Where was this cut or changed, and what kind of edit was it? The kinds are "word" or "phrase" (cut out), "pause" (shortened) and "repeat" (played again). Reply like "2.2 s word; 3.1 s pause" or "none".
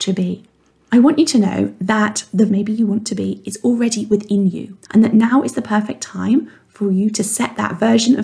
2.5 s phrase; 4.8 s pause